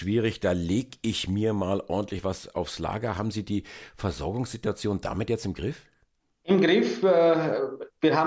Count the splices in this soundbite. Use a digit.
0